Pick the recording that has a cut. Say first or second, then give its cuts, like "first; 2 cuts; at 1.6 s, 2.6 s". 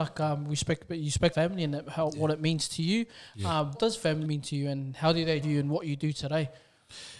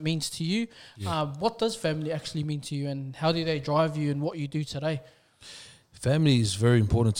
first; 4 cuts; at 1.3 s, 3.7 s, 4.2 s, 5.4 s